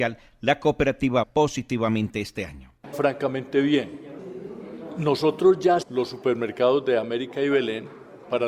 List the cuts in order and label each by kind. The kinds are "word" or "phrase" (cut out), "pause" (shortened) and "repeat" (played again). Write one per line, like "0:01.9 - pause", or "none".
0:01.2 - word
0:02.9 - phrase
0:05.8 - word